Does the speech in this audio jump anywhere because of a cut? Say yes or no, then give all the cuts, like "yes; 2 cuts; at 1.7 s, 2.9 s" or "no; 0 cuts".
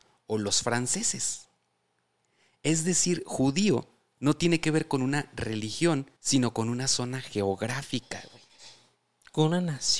yes; 1 cut; at 6.2 s